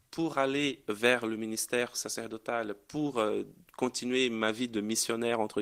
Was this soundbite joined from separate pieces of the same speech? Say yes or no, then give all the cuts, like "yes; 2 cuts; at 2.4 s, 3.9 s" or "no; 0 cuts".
no; 0 cuts